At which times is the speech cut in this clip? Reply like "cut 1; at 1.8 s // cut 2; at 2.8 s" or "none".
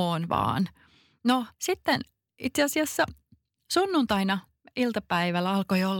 cut 1; at 1.5 s // cut 2; at 4.6 s